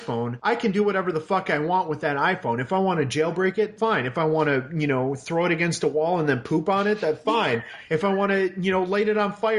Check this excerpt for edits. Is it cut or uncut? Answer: uncut